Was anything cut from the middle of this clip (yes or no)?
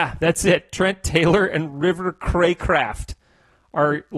no